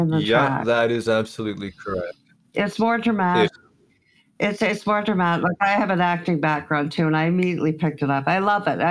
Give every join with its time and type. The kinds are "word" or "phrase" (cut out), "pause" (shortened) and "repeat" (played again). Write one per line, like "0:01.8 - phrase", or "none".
0:03.5 - word